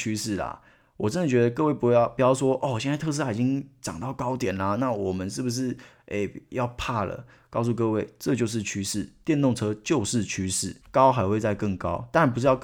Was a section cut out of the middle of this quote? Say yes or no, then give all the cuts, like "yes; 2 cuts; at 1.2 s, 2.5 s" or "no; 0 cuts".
yes; 1 cut; at 10.8 s